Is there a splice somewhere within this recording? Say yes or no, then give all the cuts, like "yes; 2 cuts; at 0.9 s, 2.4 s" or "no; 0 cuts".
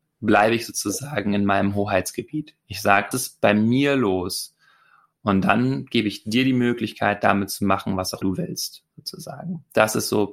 yes; 2 cuts; at 3.1 s, 8.2 s